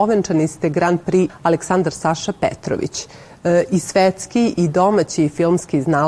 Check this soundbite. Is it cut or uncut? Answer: cut